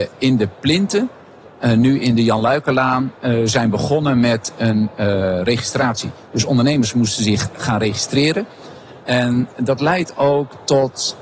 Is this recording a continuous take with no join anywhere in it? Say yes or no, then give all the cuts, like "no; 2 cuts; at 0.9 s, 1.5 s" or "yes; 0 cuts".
yes; 0 cuts